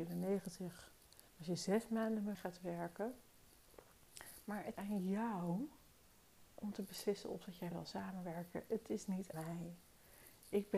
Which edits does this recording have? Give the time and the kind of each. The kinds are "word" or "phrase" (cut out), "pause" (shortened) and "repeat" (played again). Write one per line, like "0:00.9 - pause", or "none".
0:01.3 - pause
0:02.3 - word
0:04.7 - word
0:06.5 - pause
0:07.7 - phrase
0:09.3 - word